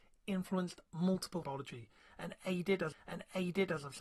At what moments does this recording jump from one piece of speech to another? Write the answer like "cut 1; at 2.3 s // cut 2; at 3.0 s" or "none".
cut 1; at 1.4 s // cut 2; at 2.9 s